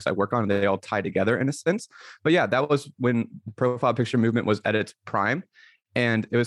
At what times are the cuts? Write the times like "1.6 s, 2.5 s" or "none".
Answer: none